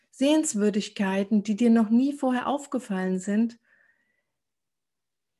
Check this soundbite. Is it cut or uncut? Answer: uncut